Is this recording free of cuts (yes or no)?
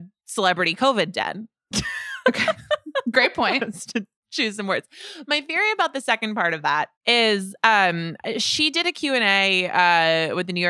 no